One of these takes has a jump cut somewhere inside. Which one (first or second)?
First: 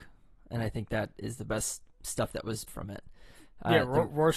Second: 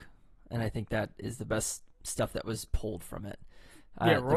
first